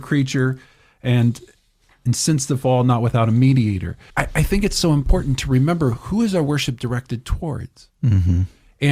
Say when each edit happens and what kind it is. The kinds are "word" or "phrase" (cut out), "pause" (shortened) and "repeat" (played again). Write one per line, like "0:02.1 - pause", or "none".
0:04.1 - pause